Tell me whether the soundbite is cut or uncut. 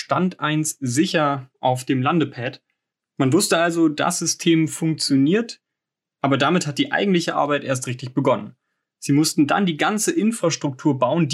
uncut